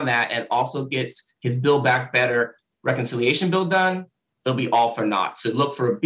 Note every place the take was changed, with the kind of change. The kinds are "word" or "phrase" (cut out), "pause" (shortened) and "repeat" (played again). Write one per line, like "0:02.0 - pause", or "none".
none